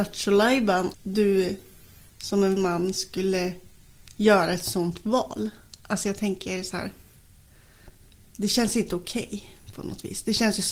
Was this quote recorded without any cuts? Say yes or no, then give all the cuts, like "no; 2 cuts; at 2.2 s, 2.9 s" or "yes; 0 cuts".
no; 2 cuts; at 0.9 s, 2.6 s